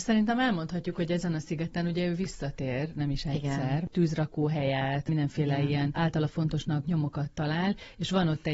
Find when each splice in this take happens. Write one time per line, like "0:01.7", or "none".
0:06.8

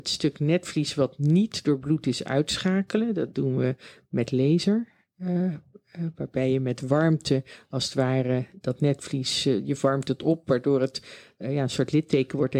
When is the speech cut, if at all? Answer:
none

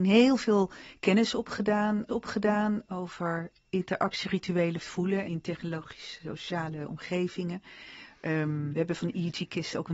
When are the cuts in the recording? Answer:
0:02.1
0:04.8
0:05.2
0:08.7

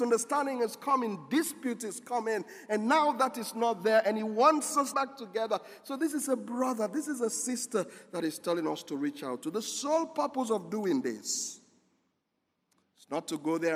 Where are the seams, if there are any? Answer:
0:04.9

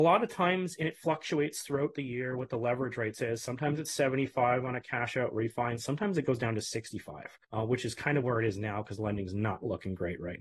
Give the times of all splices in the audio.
0:07.4

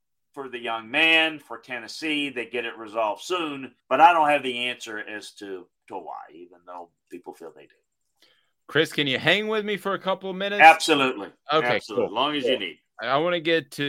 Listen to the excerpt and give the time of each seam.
0:03.8
0:07.1

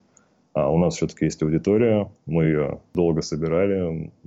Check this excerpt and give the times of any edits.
none

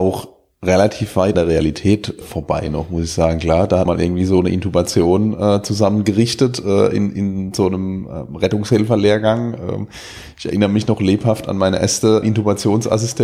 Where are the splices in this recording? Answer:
0:01.3
0:02.2
0:03.9
0:12.2

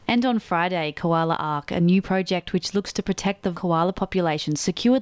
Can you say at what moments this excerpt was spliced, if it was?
0:03.5

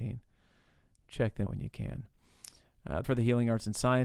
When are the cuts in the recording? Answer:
0:01.5
0:03.0

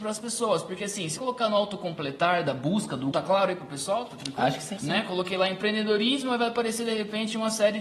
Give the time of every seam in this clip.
0:01.2
0:03.1
0:04.8

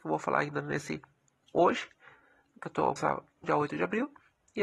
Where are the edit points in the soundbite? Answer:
0:03.0
0:03.4

